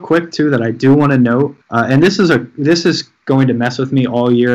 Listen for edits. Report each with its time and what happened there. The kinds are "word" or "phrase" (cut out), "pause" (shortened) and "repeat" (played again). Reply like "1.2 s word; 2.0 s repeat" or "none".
1.6 s pause